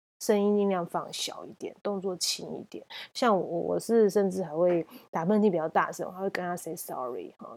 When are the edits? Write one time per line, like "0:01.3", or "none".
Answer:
none

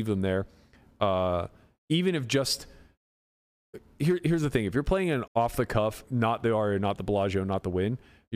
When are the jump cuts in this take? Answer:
0:05.3
0:06.0

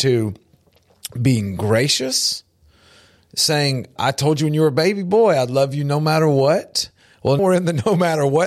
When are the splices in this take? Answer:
0:04.0
0:07.4

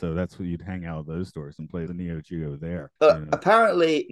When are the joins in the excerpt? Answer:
0:01.9
0:03.0

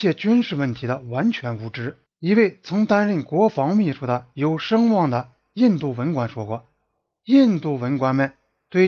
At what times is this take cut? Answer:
none

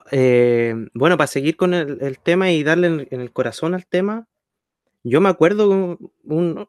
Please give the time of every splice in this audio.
none

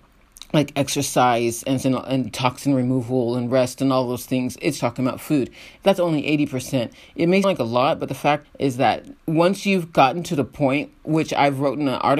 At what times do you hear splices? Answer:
0:01.8
0:04.8
0:07.4
0:08.4
0:09.2

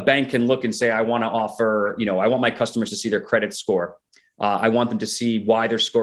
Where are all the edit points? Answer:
none

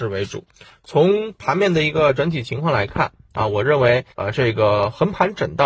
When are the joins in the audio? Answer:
0:04.1

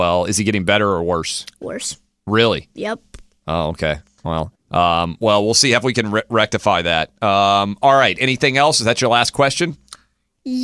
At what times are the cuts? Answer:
0:04.5

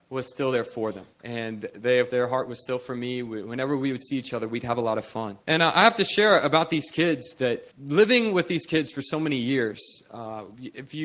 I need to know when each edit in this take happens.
0:01.1
0:02.1
0:05.4
0:07.7

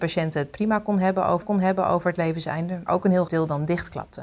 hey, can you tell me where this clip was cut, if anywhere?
0:01.4
0:02.9
0:03.3

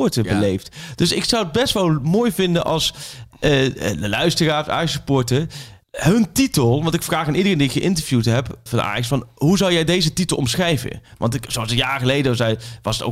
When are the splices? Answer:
0:05.8
0:08.7
0:11.5

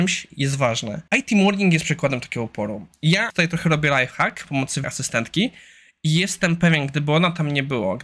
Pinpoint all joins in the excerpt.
0:01.1
0:03.3
0:04.4
0:04.8

